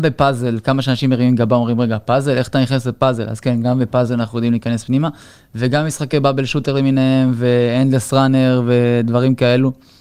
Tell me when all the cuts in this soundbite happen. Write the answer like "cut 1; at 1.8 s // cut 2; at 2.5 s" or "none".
none